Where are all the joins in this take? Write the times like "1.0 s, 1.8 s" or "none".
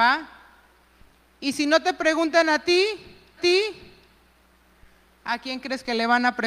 3.4 s